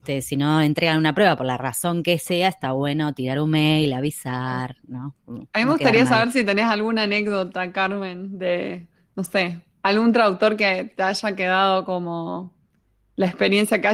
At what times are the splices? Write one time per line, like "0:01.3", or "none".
none